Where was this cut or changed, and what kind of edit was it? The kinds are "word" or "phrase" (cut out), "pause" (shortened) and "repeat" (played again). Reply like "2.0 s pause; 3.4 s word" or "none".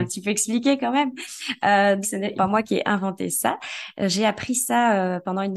2.0 s word; 2.3 s word